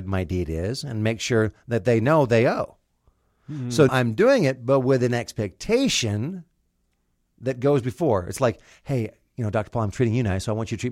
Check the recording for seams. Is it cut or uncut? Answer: cut